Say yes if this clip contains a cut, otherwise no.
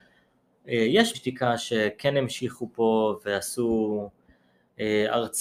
yes